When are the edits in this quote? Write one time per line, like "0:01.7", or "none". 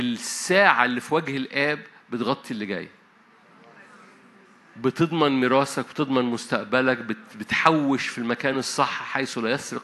none